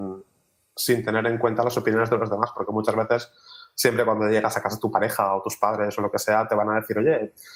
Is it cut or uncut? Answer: uncut